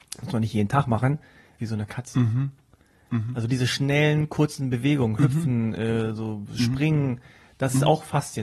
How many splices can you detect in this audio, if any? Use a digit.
1